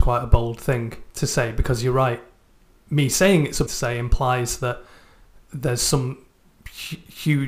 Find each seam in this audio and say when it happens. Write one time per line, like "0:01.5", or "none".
0:03.7